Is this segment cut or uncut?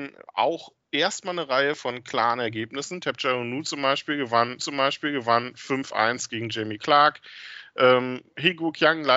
cut